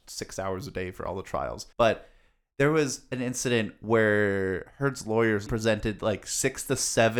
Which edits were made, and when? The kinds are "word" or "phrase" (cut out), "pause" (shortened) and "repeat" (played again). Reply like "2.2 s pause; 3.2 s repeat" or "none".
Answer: 1.7 s pause; 5.5 s word